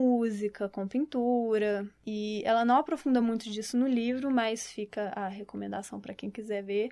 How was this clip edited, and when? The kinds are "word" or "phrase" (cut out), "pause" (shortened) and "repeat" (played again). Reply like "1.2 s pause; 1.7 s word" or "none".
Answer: none